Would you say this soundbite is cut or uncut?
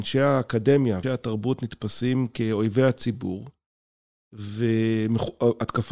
cut